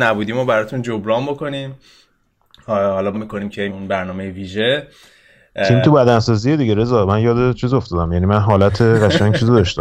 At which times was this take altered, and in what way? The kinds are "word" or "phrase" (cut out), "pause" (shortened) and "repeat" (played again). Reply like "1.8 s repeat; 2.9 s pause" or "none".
3.1 s phrase; 3.7 s phrase